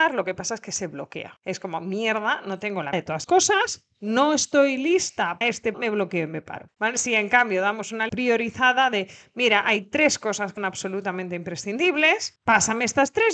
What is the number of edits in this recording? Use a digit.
6